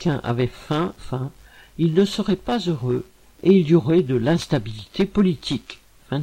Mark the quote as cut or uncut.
cut